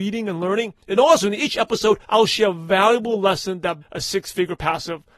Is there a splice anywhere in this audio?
yes; 2 cuts; at 2.0 s, 3.8 s

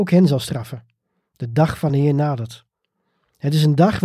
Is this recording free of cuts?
yes; 0 cuts

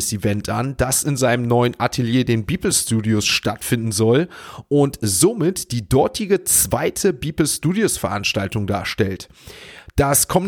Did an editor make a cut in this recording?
no; 0 cuts

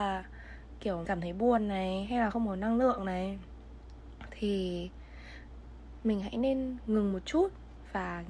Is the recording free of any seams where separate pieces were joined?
no; 1 cut; at 1.0 s

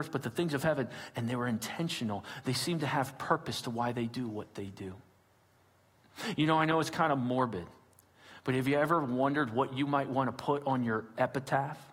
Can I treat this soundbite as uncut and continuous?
yes; 0 cuts

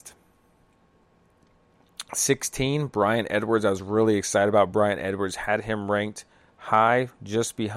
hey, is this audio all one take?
yes; 0 cuts

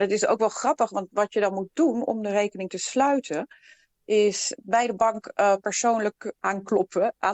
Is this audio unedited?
yes; 0 cuts

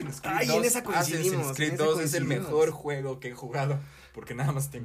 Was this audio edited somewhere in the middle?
no; 0 cuts

